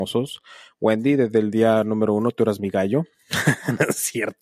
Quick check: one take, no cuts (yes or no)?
yes